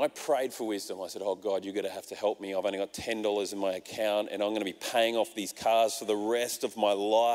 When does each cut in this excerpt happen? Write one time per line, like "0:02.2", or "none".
none